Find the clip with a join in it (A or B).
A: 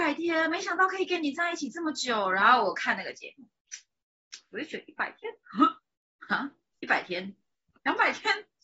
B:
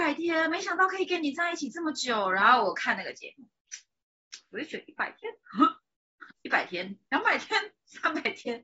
B